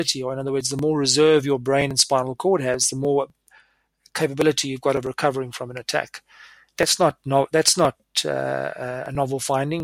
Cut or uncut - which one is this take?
uncut